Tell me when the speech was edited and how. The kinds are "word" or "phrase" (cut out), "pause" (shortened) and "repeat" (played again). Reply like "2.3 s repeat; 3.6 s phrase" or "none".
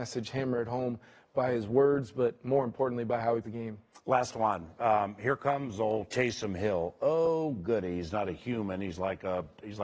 3.4 s word